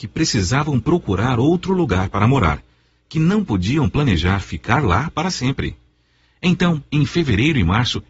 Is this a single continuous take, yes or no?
yes